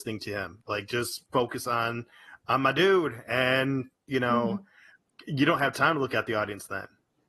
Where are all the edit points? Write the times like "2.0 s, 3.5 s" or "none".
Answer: 1.3 s